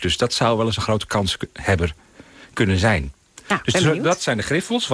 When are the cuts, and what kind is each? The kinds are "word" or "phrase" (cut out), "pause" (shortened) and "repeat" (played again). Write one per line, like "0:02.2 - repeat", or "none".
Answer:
none